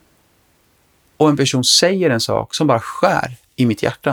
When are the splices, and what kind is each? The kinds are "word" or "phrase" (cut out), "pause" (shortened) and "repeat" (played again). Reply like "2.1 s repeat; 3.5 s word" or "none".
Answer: none

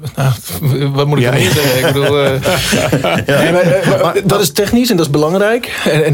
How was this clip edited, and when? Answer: none

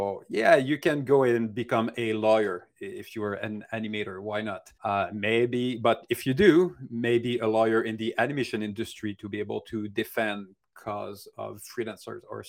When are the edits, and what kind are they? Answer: 4.7 s pause

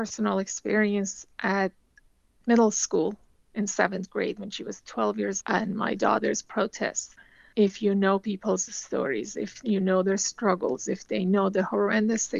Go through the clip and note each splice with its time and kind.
5.4 s word

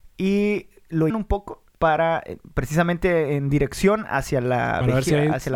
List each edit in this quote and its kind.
1.1 s word; 1.7 s pause

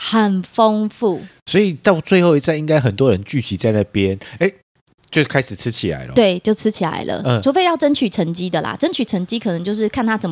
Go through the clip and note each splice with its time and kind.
none

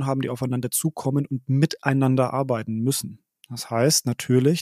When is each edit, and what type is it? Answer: none

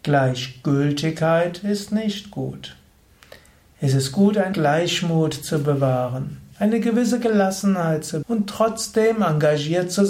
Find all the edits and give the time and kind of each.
4.5 s word; 8.2 s word

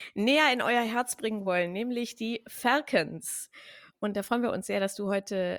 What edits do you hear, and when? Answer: none

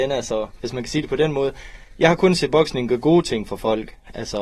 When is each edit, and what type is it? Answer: none

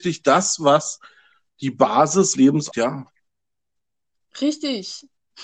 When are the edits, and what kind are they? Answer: 2.3 s word; 2.7 s word

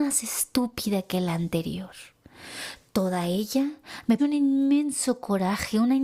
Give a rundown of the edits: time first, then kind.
4.2 s word

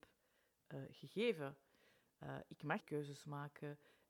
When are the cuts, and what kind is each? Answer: 2.8 s word

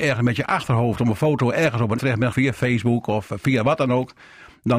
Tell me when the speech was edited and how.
2.0 s word; 2.3 s word

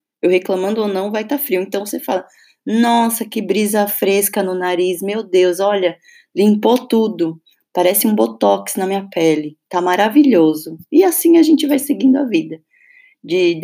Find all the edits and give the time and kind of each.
none

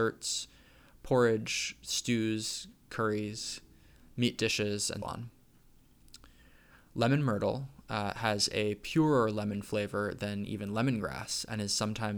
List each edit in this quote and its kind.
5.0 s word

